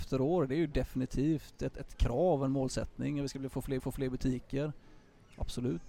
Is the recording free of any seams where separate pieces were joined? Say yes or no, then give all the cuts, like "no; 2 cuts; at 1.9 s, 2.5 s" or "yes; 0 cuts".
no; 1 cut; at 3.8 s